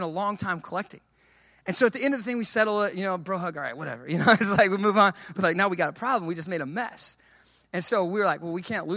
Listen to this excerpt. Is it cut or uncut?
uncut